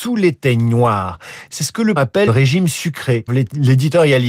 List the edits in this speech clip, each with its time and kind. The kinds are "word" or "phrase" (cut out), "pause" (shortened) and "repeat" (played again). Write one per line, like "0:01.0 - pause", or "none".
0:02.0 - word
0:02.3 - word
0:03.3 - word